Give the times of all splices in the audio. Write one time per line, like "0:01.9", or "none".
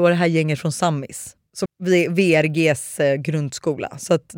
0:01.7